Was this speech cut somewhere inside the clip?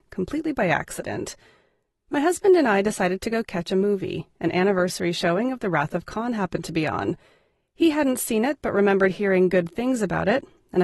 no; 0 cuts

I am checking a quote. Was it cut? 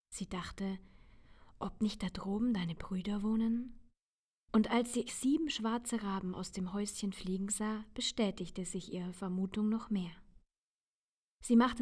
yes; 1 cut; at 5.1 s

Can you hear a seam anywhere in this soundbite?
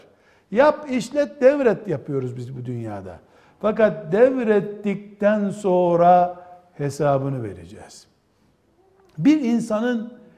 no; 0 cuts

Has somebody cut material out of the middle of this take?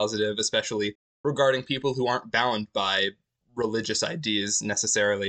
no; 0 cuts

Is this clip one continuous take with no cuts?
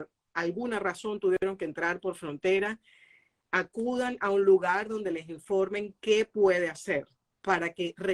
yes; 0 cuts

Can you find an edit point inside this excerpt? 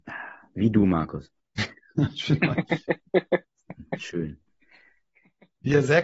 no; 0 cuts

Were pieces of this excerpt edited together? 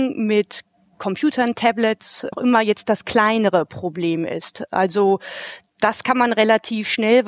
yes; 1 cut; at 2.3 s

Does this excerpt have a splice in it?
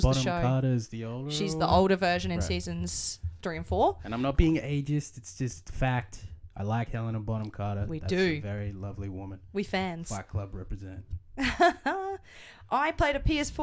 no; 0 cuts

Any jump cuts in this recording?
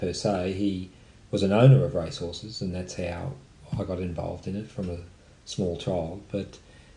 no; 0 cuts

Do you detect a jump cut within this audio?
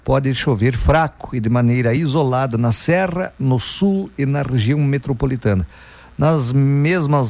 no; 0 cuts

